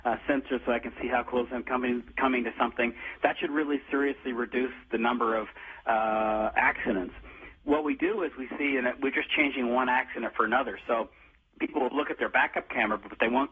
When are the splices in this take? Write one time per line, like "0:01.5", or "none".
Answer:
none